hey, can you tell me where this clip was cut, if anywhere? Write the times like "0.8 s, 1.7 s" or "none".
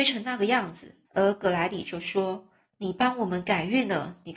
1.0 s